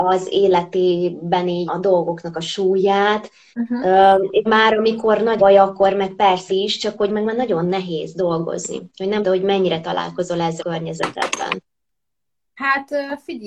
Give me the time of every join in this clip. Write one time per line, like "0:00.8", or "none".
0:01.7
0:04.5
0:05.4
0:06.5
0:07.1
0:09.2
0:10.6